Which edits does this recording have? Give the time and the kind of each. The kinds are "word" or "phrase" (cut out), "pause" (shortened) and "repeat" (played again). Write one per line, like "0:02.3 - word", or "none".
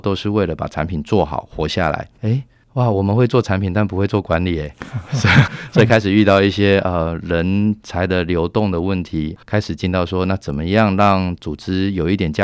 0:02.2 - pause
0:05.5 - word
0:09.4 - pause